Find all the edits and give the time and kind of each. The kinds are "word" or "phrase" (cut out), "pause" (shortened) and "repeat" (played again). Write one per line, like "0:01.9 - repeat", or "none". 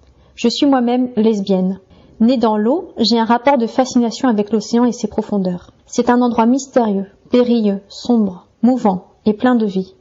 0:01.9 - pause
0:05.8 - pause
0:08.5 - pause